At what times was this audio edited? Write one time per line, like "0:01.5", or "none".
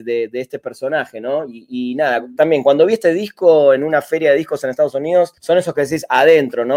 0:05.4